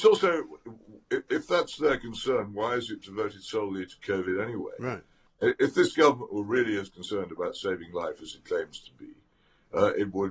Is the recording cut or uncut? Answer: uncut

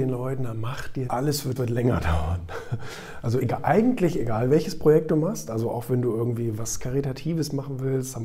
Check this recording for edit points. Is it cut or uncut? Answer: cut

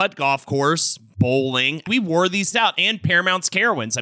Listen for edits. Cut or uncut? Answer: cut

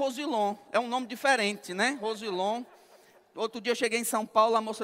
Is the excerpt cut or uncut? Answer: uncut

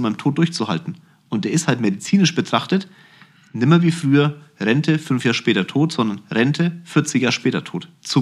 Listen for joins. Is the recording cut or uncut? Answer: uncut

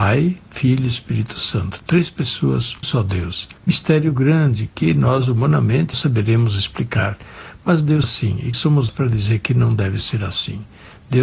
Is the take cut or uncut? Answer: cut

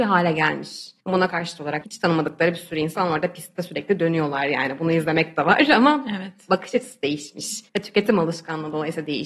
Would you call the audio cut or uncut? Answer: cut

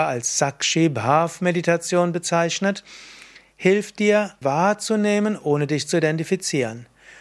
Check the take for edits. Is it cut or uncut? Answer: cut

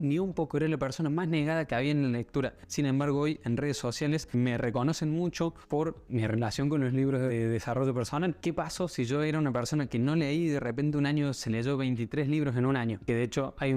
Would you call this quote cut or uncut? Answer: uncut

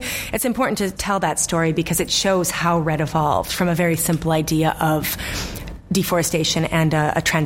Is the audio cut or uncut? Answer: uncut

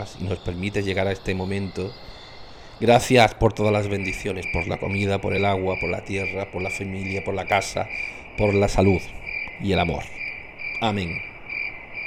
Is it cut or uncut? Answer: uncut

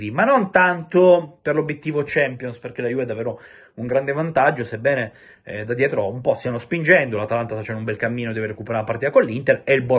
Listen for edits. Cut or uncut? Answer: uncut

